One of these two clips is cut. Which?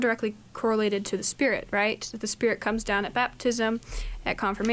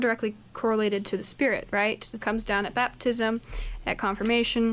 second; 1 cut; at 2.2 s

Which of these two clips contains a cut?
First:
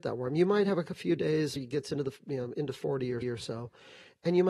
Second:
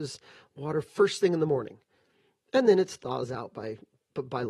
first; 2 cuts; at 1.6 s, 3.2 s

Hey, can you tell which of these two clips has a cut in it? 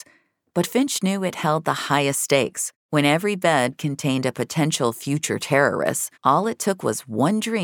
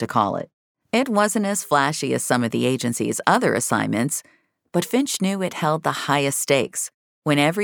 first; 2 cuts; at 2.8 s, 6.1 s

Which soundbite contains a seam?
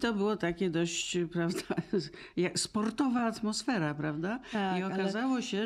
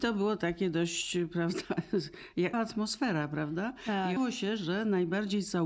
second; 2 cuts; at 2.5 s, 4.2 s

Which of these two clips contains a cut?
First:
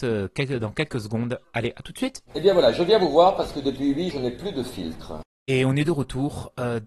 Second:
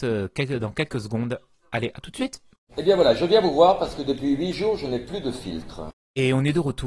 first; 3 cuts; at 1.4 s, 2.3 s, 4.1 s

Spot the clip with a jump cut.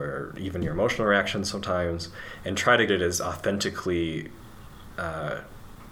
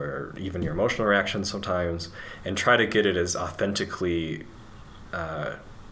first; 1 cut; at 2.9 s

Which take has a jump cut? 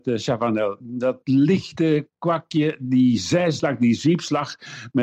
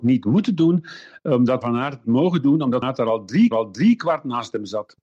second; 4 cuts; at 1.6 s, 2.0 s, 2.8 s, 3.5 s

